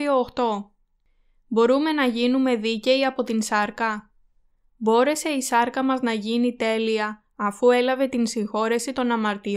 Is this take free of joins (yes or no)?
yes